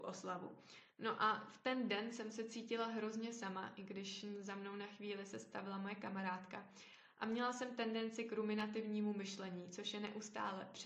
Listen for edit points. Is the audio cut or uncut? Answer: uncut